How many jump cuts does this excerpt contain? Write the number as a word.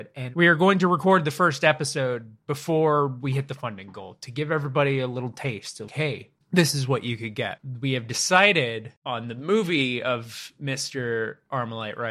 three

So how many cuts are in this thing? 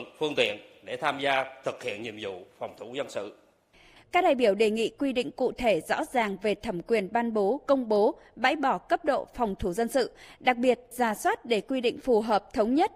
zero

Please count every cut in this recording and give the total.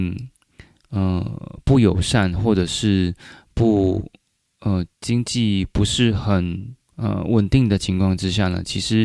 two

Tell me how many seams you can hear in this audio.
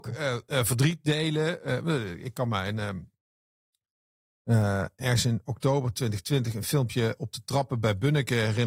zero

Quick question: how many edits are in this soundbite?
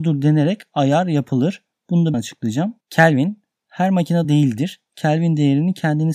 three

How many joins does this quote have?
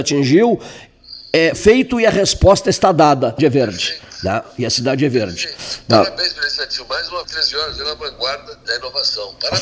four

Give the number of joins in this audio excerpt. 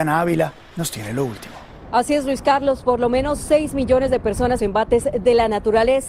one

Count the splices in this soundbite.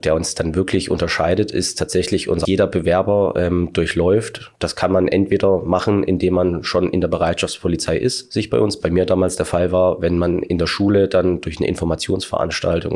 two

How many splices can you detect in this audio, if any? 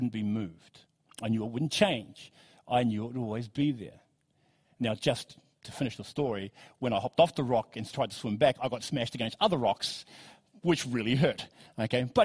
zero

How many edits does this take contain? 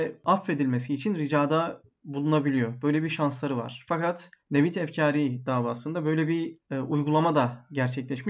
two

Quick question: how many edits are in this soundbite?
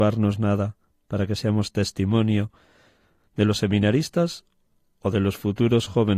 zero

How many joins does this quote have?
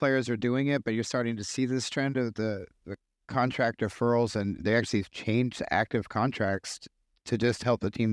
zero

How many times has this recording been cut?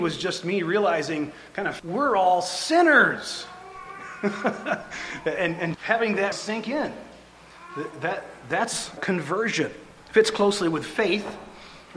four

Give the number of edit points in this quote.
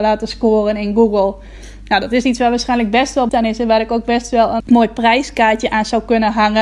two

